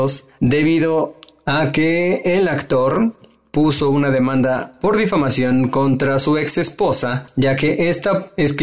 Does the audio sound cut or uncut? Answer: uncut